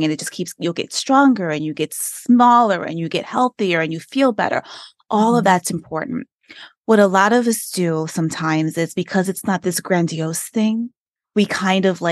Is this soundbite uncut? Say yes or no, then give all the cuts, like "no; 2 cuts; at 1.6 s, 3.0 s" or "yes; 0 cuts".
no; 1 cut; at 11.1 s